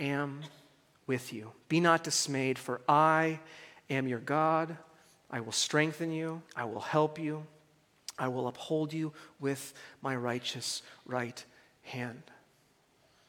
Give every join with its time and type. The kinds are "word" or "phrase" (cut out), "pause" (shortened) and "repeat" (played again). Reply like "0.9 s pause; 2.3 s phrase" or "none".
6.5 s pause

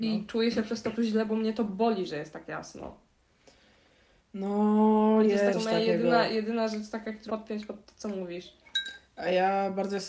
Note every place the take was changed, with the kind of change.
0.9 s word; 5.5 s word; 7.3 s word

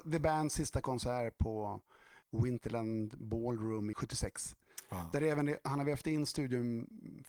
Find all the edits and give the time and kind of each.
2.2 s pause; 3.9 s phrase

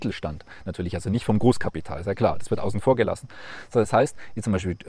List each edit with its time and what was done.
none

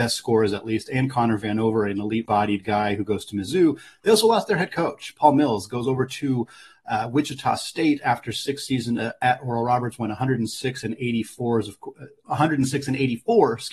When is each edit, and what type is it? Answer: 2.3 s phrase

